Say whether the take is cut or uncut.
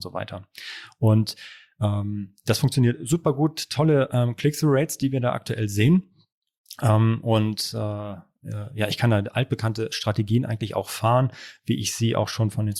uncut